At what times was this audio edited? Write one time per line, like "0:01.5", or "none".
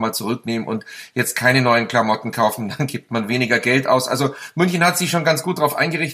none